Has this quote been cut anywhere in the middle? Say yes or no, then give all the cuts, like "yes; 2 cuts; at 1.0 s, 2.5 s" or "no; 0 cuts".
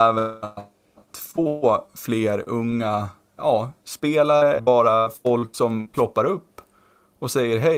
yes; 2 cuts; at 3.4 s, 4.6 s